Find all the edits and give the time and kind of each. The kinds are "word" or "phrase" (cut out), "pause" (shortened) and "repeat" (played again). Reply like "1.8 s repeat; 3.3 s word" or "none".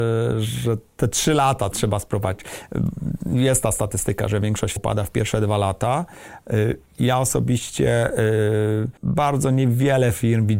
1.7 s word; 4.8 s word; 9.0 s pause